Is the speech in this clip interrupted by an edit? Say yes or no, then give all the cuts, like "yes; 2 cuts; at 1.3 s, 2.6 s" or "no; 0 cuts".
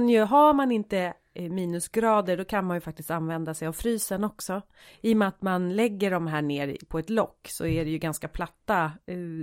no; 0 cuts